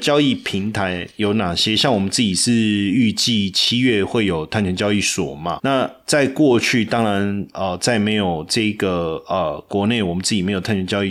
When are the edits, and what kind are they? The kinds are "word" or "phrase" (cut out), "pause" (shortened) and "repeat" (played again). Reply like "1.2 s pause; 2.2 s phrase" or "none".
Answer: 5.6 s word